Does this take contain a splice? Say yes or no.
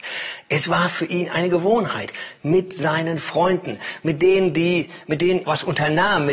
yes